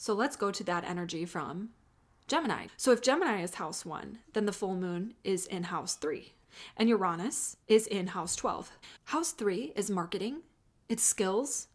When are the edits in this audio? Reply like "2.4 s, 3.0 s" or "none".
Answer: 7.6 s